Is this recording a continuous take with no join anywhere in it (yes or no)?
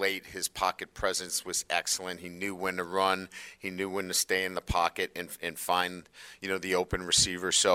yes